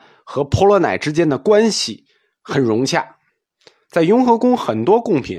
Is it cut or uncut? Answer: uncut